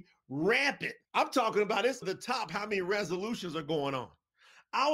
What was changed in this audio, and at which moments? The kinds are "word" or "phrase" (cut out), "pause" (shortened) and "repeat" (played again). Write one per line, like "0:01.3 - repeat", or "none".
0:01.1 - pause
0:02.0 - word

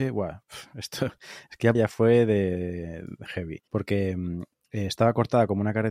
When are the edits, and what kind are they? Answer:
0:01.7 - phrase
0:03.7 - pause

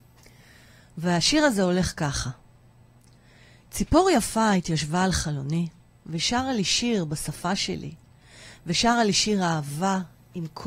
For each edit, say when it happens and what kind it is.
none

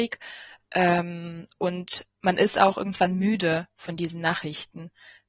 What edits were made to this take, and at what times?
0:02.1 - pause

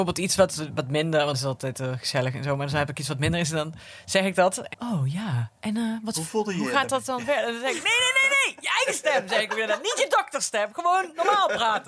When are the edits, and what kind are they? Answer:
0:01.3 - word
0:04.7 - phrase
0:05.5 - pause

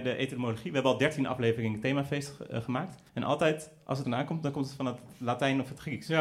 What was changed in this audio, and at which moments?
0:03.1 - pause
0:04.0 - word

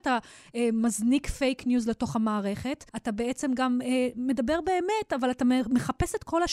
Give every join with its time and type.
0:02.9 - pause

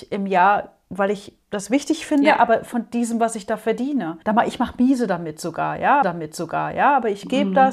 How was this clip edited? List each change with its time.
0:01.4 - pause
0:04.2 - pause
0:06.0 - repeat

